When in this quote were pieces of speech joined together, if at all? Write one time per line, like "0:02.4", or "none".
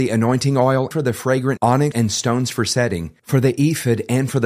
0:00.9
0:01.6
0:01.9